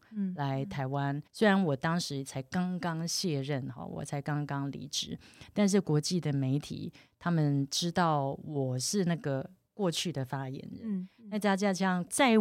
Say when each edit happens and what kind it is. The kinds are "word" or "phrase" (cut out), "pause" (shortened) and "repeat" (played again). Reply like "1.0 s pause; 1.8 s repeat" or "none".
1.3 s pause